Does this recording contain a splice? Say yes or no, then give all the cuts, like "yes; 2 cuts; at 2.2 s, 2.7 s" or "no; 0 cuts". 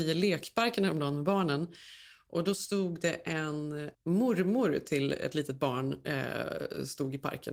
yes; 1 cut; at 3.9 s